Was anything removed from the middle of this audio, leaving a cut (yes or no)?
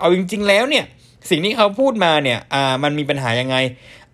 no